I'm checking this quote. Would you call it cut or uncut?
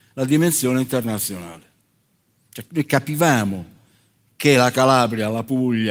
uncut